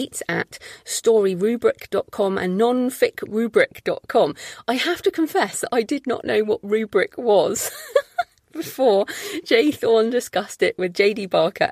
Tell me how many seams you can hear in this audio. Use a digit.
0